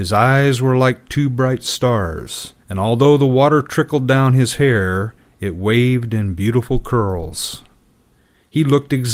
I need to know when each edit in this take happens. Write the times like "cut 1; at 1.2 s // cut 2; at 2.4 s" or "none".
cut 1; at 2.6 s